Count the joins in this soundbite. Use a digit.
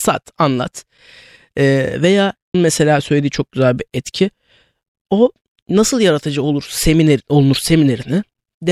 1